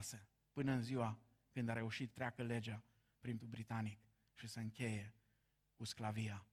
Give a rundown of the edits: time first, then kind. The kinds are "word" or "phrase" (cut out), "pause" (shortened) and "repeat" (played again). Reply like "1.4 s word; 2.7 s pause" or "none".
2.1 s word; 3.4 s word